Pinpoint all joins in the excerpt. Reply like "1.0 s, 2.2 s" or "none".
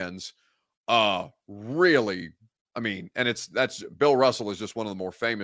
none